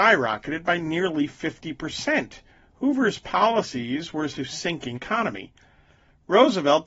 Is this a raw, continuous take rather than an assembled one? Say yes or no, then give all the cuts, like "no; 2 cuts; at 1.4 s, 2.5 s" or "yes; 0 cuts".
no; 3 cuts; at 2.5 s, 4.3 s, 4.9 s